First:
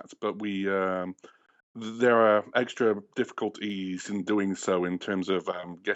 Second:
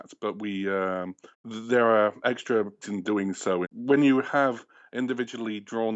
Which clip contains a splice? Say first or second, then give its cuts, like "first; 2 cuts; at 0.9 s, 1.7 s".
second; 3 cuts; at 1.3 s, 2.8 s, 3.6 s